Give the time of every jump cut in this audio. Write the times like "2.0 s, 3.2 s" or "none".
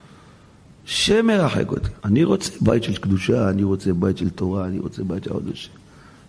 2.0 s